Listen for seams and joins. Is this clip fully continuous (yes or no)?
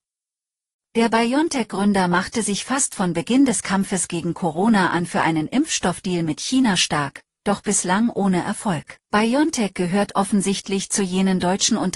no